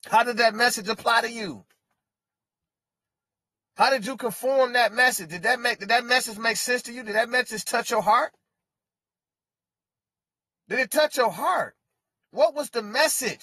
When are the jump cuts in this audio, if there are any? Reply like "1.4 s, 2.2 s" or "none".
none